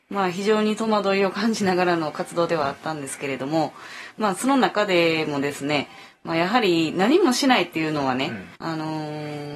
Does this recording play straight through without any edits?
no; 1 cut; at 8.6 s

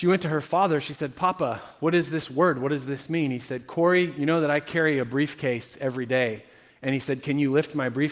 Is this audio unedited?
yes; 0 cuts

